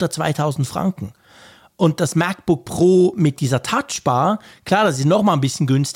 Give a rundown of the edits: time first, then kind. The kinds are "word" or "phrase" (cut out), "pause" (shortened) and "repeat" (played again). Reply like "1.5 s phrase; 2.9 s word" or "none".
none